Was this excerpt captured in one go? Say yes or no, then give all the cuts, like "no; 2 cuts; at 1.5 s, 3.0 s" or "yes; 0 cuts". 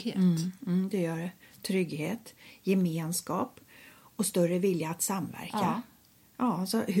yes; 0 cuts